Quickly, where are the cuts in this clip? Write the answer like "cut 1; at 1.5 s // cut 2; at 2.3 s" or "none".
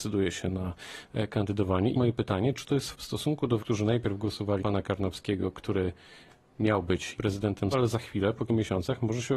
cut 1; at 1.9 s // cut 2; at 2.9 s // cut 3; at 3.6 s // cut 4; at 4.6 s // cut 5; at 7.1 s // cut 6; at 7.7 s // cut 7; at 8.5 s